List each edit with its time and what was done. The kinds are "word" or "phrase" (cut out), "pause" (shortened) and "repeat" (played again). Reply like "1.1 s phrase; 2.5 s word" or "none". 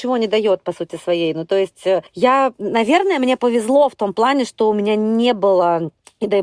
2.5 s word